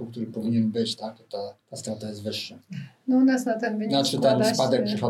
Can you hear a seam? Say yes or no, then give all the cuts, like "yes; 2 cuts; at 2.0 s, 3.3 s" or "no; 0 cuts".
yes; 1 cut; at 1.6 s